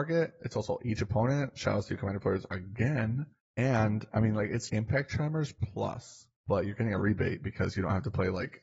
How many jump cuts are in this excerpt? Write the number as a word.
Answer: three